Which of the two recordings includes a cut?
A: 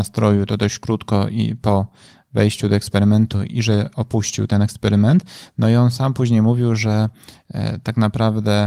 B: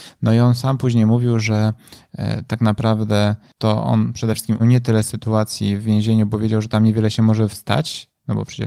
B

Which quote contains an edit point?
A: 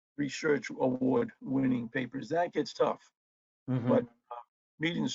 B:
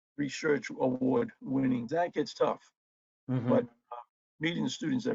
B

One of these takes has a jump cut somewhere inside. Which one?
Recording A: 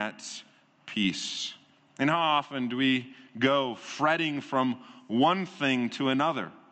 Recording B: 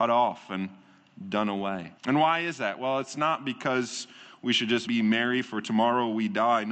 B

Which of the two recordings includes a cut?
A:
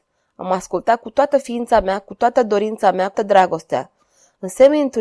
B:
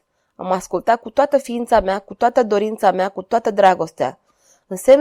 A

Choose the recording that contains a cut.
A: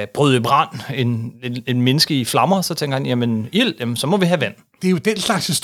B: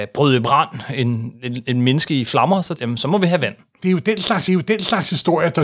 B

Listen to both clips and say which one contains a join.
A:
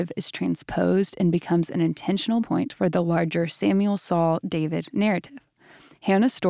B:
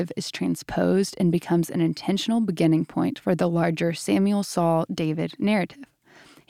A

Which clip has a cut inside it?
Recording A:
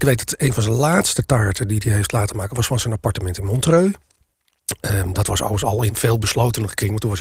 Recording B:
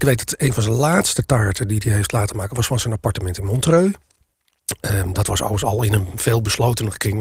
A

